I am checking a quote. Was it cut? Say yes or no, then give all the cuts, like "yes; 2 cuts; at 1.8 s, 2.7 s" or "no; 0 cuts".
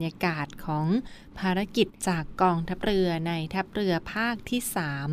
yes; 1 cut; at 2.0 s